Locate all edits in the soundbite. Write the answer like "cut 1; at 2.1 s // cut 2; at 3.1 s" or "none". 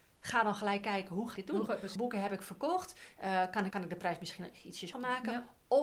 cut 1; at 1.4 s // cut 2; at 2.0 s // cut 3; at 3.7 s // cut 4; at 4.9 s